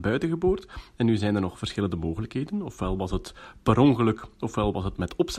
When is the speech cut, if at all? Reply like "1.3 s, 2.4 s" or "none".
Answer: none